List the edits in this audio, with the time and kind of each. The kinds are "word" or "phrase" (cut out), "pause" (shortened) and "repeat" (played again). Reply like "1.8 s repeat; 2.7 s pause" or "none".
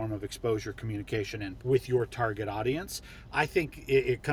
1.6 s word